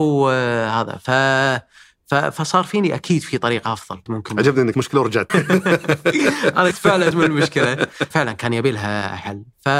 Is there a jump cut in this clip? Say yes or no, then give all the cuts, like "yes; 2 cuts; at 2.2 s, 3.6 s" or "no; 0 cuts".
yes; 6 cuts; at 4.1 s, 4.7 s, 5.3 s, 6.7 s, 7.1 s, 8.1 s